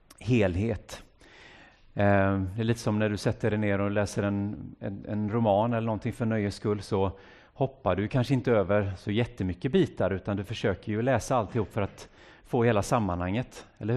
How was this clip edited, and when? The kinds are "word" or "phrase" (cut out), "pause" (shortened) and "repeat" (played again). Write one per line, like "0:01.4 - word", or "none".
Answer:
none